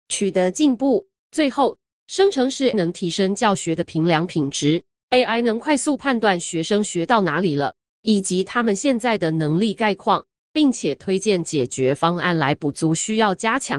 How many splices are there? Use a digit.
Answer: 1